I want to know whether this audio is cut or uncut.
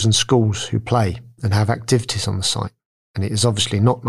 uncut